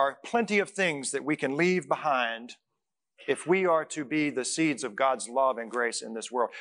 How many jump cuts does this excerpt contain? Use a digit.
0